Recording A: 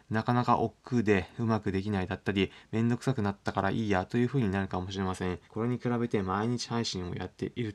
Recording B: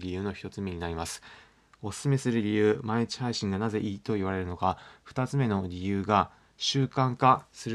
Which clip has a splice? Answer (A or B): A